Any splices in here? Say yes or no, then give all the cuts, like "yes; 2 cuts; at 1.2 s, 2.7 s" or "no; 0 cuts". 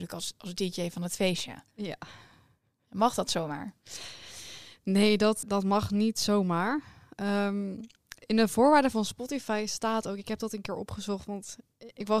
yes; 1 cut; at 5.4 s